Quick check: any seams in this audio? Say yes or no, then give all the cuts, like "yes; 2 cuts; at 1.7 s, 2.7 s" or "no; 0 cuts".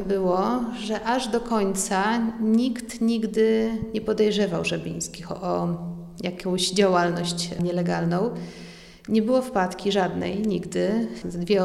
no; 0 cuts